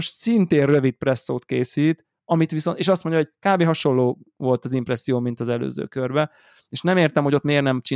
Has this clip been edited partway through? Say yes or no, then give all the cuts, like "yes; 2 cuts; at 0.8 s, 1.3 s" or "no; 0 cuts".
no; 0 cuts